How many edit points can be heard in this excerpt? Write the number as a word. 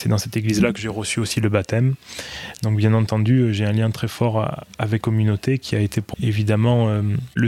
two